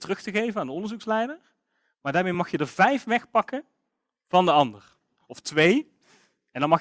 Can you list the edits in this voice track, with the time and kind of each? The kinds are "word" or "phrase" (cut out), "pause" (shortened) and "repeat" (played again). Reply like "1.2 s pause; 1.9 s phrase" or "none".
none